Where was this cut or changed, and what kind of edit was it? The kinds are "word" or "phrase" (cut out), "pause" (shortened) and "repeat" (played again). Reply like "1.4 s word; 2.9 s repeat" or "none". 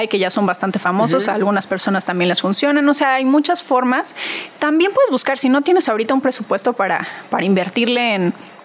none